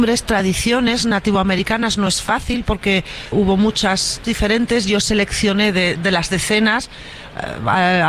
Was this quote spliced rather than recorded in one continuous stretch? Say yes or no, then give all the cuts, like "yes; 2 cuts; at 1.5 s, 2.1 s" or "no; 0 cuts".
yes; 3 cuts; at 3.3 s, 4.2 s, 6.0 s